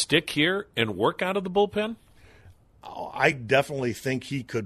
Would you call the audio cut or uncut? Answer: uncut